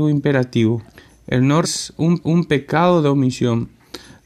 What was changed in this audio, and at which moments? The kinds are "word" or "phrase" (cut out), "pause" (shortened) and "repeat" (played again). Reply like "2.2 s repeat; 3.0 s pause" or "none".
0.9 s pause; 1.6 s word; 2.2 s repeat